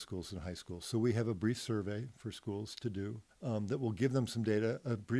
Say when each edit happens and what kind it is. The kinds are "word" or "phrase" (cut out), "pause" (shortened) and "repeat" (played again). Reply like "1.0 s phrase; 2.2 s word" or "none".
3.3 s pause